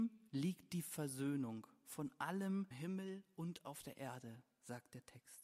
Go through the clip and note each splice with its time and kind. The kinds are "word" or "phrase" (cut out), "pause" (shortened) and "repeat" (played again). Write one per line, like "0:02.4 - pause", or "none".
0:02.7 - word